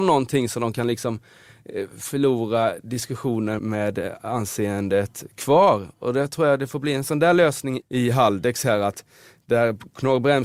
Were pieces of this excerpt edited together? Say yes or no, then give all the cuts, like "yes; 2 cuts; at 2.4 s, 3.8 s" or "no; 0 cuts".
yes; 2 cuts; at 3.6 s, 7.8 s